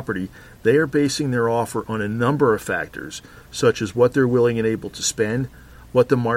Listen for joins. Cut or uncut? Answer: uncut